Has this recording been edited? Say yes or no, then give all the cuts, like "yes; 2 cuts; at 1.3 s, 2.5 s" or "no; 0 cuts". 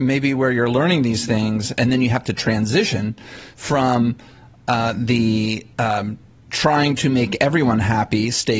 yes; 1 cut; at 5.7 s